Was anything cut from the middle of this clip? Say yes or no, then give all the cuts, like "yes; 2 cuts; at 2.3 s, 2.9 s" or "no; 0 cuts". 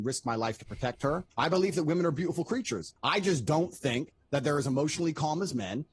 yes; 2 cuts; at 1.3 s, 3.0 s